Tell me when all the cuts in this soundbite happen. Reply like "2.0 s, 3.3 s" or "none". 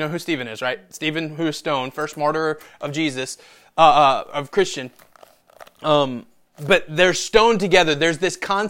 none